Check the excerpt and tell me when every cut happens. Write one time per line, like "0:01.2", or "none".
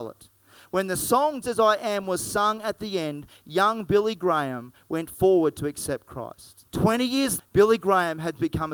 0:01.4
0:06.7
0:07.4